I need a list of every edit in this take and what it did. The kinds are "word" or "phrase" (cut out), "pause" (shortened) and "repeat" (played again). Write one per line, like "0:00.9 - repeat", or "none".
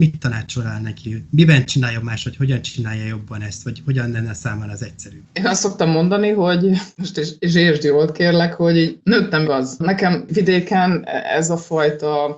0:09.4 - phrase